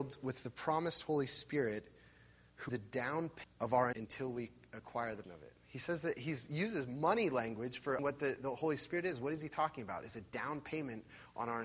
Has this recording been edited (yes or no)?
yes